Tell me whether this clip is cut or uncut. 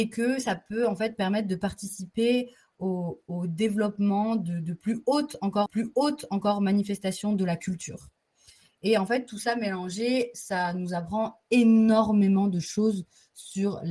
cut